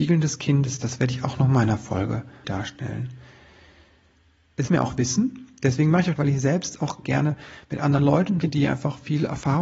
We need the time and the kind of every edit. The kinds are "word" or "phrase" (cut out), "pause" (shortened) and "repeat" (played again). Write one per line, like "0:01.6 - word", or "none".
0:02.4 - word
0:04.7 - word
0:06.2 - phrase
0:07.0 - phrase
0:08.4 - word